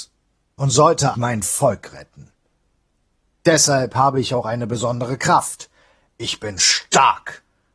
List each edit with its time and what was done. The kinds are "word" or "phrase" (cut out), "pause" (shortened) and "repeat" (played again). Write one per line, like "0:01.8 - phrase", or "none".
0:01.1 - word